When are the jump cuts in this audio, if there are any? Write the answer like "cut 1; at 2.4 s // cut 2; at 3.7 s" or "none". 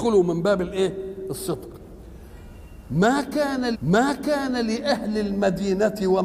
cut 1; at 3.7 s